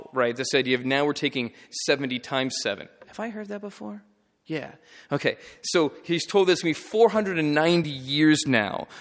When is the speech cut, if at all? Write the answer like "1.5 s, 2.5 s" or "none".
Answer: none